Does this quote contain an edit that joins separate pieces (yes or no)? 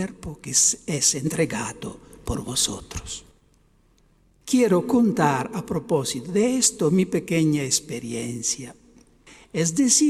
no